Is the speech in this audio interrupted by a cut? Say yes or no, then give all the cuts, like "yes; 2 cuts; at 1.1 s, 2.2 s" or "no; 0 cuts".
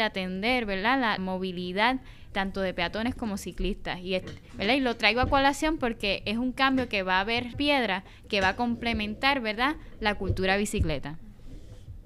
yes; 3 cuts; at 1.2 s, 2.3 s, 7.5 s